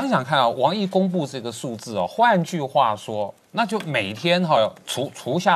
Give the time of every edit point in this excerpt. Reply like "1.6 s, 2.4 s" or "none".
none